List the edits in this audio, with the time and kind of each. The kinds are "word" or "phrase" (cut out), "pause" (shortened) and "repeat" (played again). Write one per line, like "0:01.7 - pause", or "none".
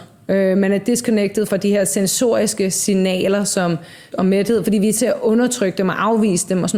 0:01.5 - word
0:04.1 - word
0:05.0 - word